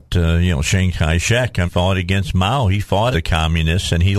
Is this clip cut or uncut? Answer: cut